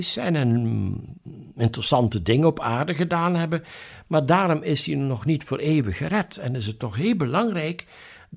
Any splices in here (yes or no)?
no